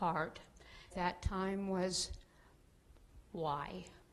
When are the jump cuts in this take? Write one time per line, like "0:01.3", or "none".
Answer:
0:00.9